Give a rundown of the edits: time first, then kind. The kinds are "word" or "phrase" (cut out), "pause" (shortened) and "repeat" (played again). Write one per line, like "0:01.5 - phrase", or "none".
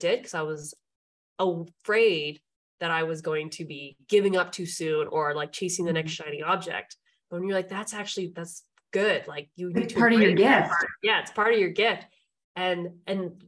none

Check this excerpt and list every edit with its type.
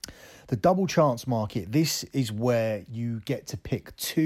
none

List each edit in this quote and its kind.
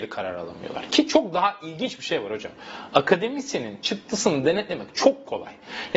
none

